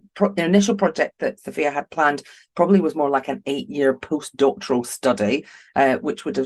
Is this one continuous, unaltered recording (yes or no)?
yes